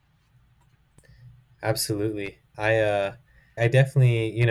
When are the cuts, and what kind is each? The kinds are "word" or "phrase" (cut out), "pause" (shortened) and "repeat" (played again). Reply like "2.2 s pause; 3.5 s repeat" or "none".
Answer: 2.5 s word; 3.6 s word